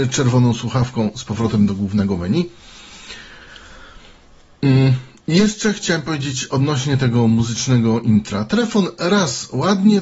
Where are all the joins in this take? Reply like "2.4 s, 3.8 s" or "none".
none